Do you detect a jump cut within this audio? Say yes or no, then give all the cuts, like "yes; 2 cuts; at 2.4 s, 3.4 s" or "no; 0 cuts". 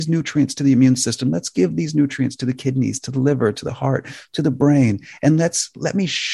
no; 0 cuts